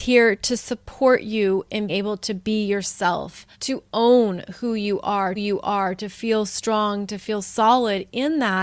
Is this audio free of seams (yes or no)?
no